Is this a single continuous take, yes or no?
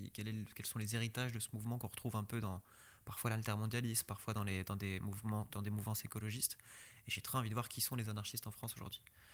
yes